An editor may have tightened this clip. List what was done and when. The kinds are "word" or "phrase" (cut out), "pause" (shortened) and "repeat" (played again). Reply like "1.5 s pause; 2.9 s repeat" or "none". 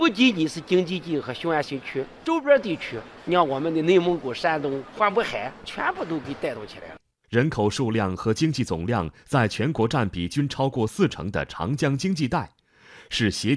none